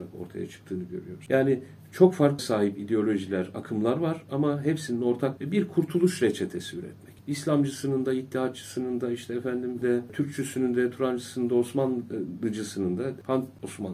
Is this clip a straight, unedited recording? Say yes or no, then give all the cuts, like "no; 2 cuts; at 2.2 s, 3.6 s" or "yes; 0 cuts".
no; 4 cuts; at 2.4 s, 5.4 s, 7.2 s, 9.8 s